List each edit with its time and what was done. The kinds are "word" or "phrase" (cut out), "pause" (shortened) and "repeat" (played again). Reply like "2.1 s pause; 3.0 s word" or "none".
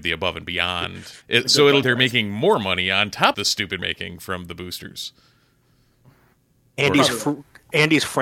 1.2 s pause; 1.8 s phrase; 3.3 s word; 3.8 s phrase

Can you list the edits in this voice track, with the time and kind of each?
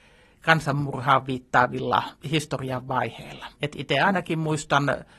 2.2 s pause; 3.5 s pause

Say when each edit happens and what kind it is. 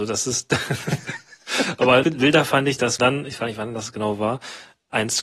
2.0 s word; 3.0 s word; 3.4 s word

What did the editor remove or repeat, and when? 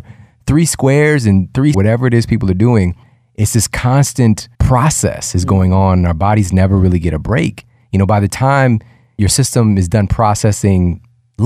1.7 s phrase; 4.5 s pause

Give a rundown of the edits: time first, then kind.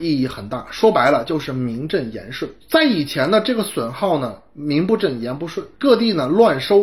2.6 s pause; 5.7 s pause

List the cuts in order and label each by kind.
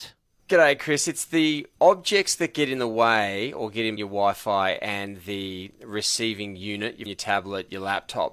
4.0 s word; 7.1 s word

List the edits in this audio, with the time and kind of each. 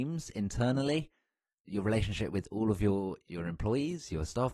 none

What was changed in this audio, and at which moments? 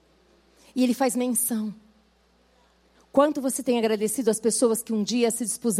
none

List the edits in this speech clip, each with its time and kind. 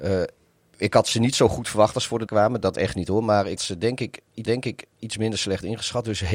2.3 s word; 2.7 s phrase; 3.6 s word; 4.4 s repeat

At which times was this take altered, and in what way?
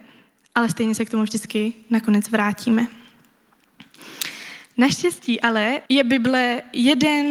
5.9 s pause

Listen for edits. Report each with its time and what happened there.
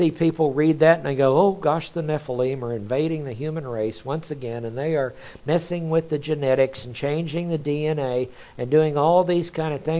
none

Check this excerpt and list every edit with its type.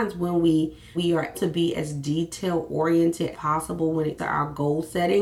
0.9 s word; 1.3 s word; 3.3 s word; 4.2 s word

